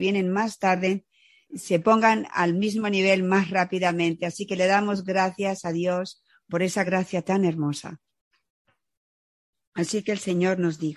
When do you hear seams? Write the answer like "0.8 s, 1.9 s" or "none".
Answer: none